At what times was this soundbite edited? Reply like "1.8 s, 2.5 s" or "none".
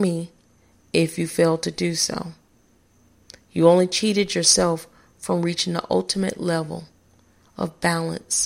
none